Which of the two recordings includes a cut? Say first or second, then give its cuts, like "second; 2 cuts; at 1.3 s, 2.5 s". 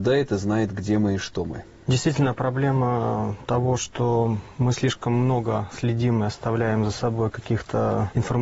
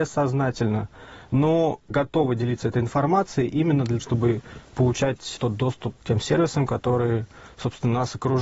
second; 1 cut; at 4.0 s